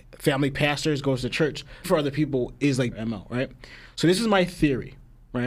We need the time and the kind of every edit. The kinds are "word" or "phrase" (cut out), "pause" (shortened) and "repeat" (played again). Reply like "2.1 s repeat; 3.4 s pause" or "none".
1.8 s word; 2.9 s word